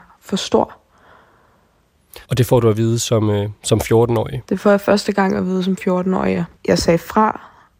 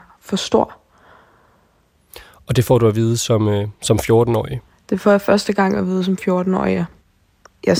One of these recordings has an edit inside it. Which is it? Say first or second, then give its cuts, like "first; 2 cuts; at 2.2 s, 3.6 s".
first; 3 cuts; at 2.2 s, 4.4 s, 6.6 s